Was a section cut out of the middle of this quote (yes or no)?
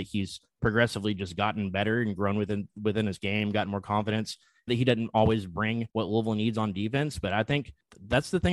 yes